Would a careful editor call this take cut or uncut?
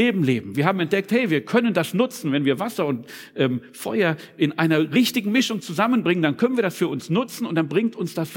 uncut